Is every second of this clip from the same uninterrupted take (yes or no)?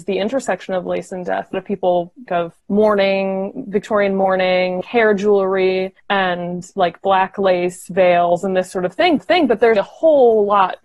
no